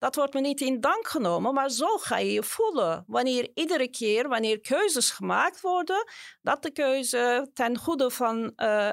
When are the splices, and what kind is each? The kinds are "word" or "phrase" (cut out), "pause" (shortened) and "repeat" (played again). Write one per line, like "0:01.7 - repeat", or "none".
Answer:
none